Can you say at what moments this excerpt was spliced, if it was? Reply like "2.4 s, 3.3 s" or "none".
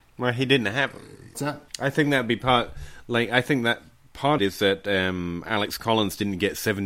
1.3 s, 1.7 s, 4.4 s